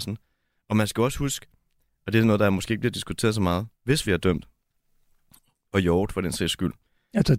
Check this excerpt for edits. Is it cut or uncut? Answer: cut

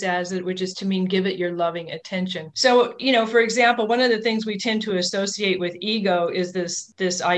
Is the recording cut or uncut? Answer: uncut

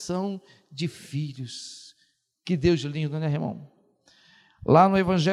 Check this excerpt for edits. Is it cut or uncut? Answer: uncut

